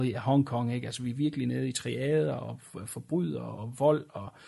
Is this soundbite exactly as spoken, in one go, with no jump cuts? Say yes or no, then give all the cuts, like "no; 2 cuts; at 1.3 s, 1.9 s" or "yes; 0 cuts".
yes; 0 cuts